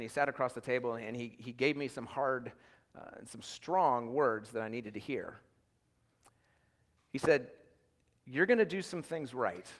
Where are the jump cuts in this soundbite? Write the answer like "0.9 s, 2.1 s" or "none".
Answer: none